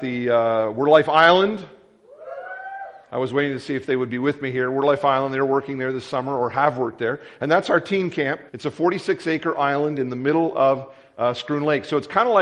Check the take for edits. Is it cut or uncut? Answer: cut